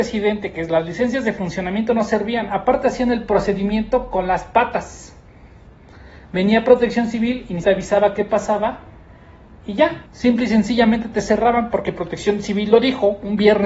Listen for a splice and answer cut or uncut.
cut